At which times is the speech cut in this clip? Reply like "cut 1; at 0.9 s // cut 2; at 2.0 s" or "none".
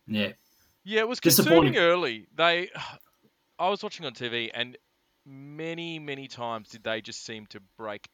none